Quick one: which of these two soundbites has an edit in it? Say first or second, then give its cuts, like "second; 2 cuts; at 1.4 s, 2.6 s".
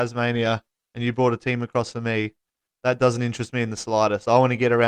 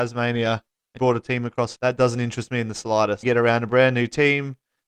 second; 3 cuts; at 1.0 s, 1.8 s, 3.2 s